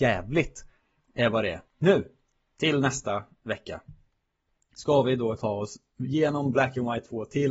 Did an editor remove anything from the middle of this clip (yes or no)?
yes